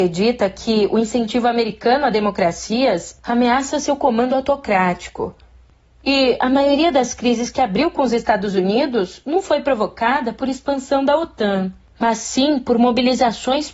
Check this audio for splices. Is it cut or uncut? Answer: uncut